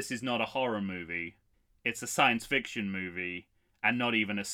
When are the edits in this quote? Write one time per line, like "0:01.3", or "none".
0:01.5